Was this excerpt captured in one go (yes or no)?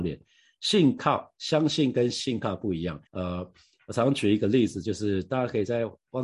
no